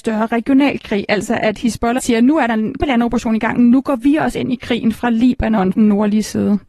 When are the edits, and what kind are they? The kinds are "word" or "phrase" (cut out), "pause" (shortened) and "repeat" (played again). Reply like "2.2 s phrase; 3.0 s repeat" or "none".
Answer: 2.0 s word; 2.8 s word; 5.7 s word